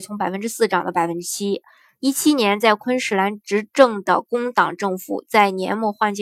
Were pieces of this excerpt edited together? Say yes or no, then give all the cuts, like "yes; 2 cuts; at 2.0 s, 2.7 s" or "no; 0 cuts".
no; 0 cuts